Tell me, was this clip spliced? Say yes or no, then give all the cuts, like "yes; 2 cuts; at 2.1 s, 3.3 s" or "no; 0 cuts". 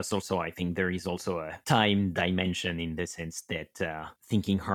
no; 0 cuts